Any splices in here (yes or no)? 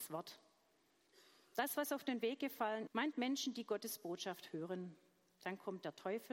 yes